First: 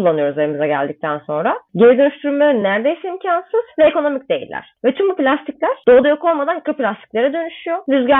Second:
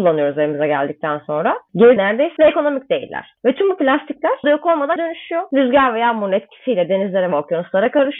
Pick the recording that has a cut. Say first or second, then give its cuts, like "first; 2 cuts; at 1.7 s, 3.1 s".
second; 4 cuts; at 2.0 s, 2.4 s, 4.4 s, 5.0 s